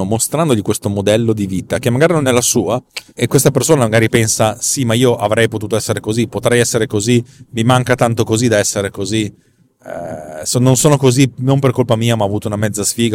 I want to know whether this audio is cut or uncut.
cut